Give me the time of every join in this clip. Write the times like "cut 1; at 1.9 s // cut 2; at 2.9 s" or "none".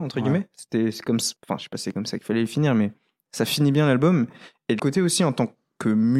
cut 1; at 1.4 s // cut 2; at 4.8 s